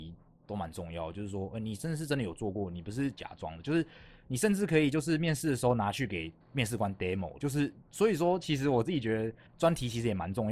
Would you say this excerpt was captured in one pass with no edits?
no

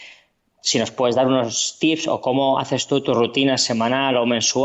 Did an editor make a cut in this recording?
no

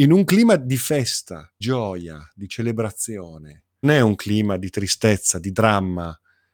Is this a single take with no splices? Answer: no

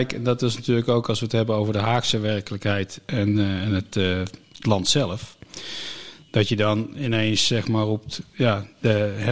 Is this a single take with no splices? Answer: yes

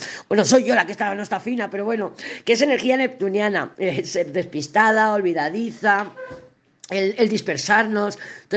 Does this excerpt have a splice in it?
no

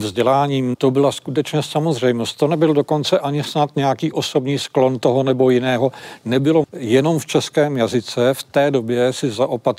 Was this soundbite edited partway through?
yes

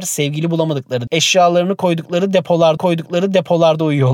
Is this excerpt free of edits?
no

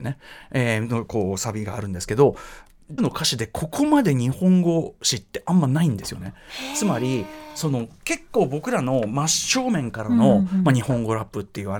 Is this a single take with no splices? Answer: no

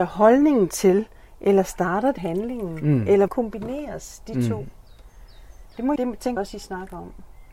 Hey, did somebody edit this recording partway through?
yes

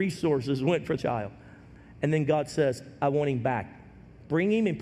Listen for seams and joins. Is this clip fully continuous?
no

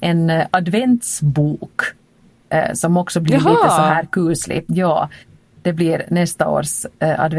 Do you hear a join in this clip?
no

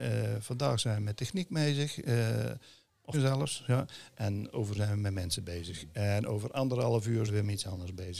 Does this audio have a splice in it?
yes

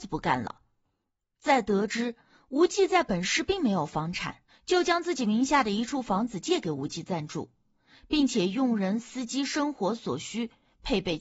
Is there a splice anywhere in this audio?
yes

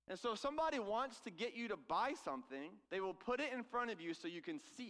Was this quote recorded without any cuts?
no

